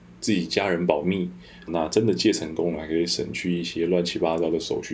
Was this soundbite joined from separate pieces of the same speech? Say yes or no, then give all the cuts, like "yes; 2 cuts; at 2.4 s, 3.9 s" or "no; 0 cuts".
yes; 1 cut; at 1.7 s